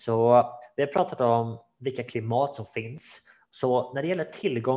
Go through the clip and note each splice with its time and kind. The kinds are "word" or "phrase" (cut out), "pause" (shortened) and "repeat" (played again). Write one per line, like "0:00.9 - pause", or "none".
none

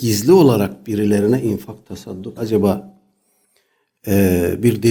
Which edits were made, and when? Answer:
0:02.4 - word

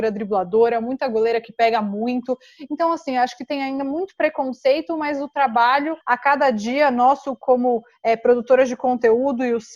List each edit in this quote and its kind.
0:06.0 - pause

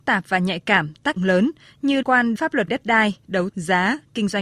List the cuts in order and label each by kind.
0:01.2 - word
0:02.0 - word
0:02.4 - word
0:02.7 - word
0:03.5 - word

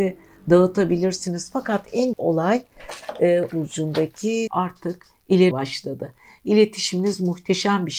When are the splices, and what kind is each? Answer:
0:02.1 - word
0:03.5 - word
0:04.5 - word
0:05.5 - word

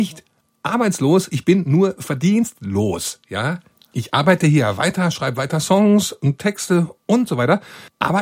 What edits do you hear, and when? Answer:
none

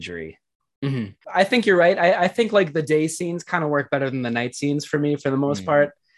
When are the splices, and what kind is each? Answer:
0:01.2 - pause

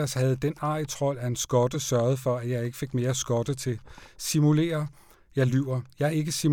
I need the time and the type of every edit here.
none

